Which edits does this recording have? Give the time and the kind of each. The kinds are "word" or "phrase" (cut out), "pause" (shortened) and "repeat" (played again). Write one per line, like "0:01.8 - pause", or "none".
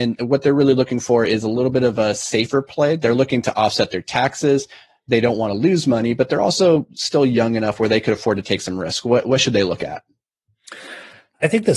none